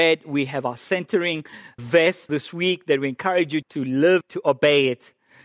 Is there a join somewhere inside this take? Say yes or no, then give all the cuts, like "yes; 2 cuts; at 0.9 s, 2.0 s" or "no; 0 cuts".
yes; 4 cuts; at 1.8 s, 2.3 s, 3.6 s, 4.2 s